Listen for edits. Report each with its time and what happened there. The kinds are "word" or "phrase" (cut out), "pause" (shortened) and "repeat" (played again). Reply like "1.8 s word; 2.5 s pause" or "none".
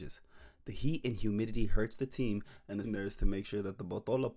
2.8 s word